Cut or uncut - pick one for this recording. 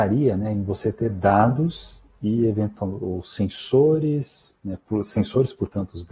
cut